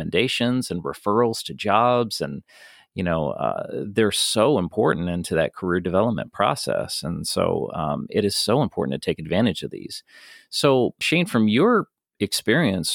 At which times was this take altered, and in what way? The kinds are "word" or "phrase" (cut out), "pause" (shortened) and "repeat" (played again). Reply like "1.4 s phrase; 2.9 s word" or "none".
none